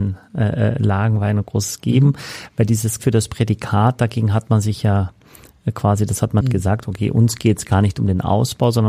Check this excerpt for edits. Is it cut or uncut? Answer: cut